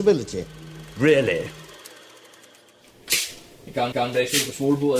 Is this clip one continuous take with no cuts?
no; 1 cut; at 3.9 s

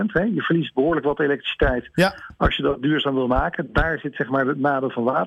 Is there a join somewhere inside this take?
no; 0 cuts

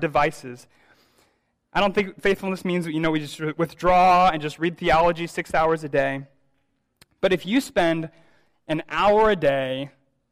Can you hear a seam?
no; 0 cuts

